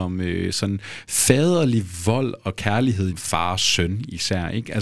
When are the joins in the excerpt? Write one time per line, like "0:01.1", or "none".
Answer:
0:03.1